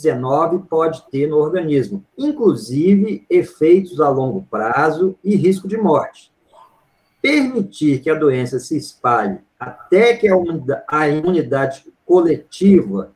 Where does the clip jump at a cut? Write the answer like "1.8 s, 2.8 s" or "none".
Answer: 2.1 s

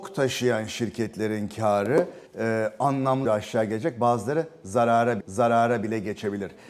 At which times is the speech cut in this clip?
2.3 s, 3.2 s, 5.2 s

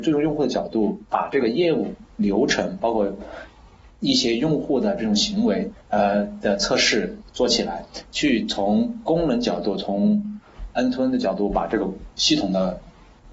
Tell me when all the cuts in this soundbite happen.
5.8 s

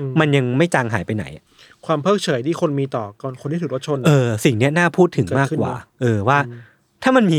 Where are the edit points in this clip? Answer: none

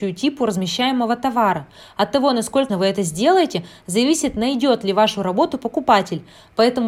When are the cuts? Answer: 2.7 s

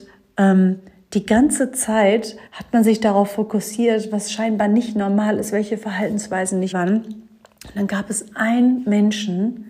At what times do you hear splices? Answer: 2.5 s, 6.7 s

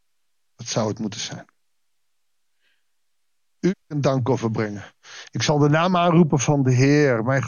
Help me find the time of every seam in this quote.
3.8 s

